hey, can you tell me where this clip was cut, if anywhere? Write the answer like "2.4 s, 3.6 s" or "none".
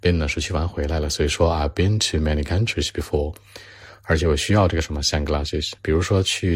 none